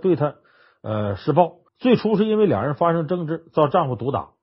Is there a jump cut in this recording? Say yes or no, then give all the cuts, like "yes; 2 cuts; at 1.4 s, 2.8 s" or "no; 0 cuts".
yes; 1 cut; at 1.7 s